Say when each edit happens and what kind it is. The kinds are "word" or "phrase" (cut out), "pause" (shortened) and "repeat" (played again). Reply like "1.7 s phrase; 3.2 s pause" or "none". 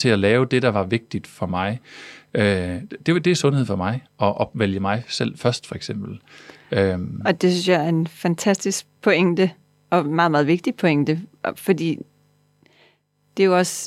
none